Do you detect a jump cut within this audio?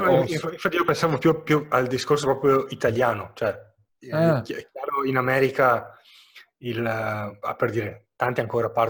no; 0 cuts

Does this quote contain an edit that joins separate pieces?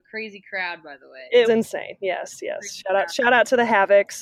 yes; 1 cut; at 1.4 s

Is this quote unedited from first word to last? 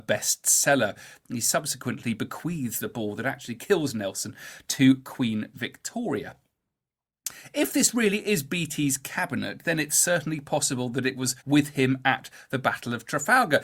no; 1 cut; at 11.4 s

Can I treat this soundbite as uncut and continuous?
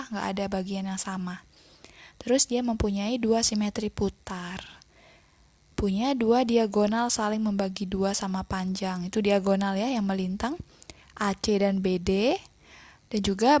yes; 0 cuts

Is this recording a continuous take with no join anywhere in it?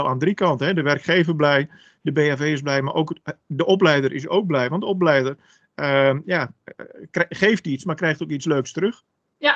yes; 0 cuts

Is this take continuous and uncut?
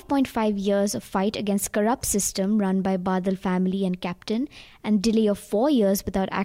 yes; 0 cuts

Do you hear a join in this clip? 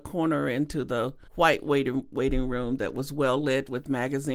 yes; 1 cut; at 1.3 s

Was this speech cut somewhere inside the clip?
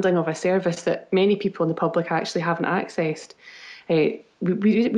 no; 0 cuts

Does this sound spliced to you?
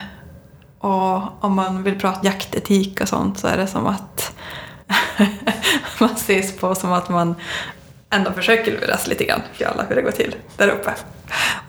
yes; 3 cuts; at 2.2 s, 4.8 s, 9.6 s

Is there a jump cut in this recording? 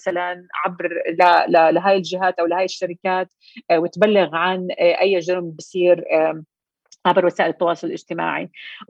no; 0 cuts

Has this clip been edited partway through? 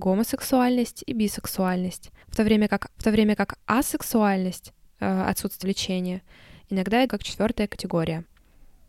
yes; 4 cuts; at 2.2 s, 3.0 s, 5.6 s, 7.1 s

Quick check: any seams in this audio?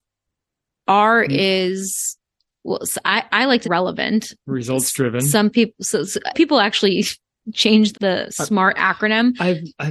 yes; 3 cuts; at 3.6 s, 6.3 s, 7.9 s

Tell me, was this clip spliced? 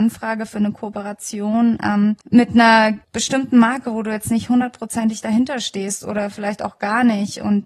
yes; 2 cuts; at 2.2 s, 3.0 s

